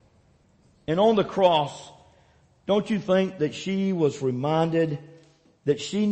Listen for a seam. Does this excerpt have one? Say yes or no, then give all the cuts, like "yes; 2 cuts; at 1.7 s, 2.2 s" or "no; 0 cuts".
no; 0 cuts